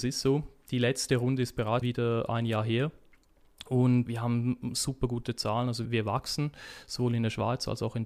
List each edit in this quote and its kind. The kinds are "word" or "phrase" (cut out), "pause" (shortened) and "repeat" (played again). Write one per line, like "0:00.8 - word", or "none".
0:01.8 - word
0:04.1 - word
0:05.8 - word